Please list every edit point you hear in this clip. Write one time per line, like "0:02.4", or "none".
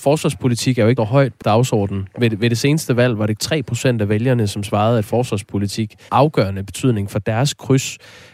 0:01.0
0:01.4
0:03.4
0:06.1